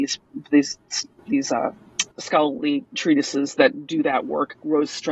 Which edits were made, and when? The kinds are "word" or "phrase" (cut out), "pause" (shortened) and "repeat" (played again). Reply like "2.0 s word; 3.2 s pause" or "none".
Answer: 2.1 s pause